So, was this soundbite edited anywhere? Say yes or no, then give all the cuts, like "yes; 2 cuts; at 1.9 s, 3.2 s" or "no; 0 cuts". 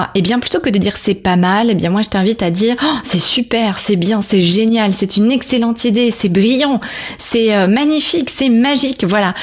no; 0 cuts